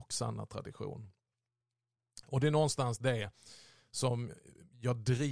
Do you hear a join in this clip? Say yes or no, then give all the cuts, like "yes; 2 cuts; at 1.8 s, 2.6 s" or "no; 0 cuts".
no; 0 cuts